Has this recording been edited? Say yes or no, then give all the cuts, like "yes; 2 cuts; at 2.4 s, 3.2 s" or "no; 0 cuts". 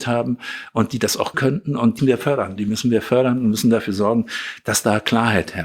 yes; 2 cuts; at 1.3 s, 2.0 s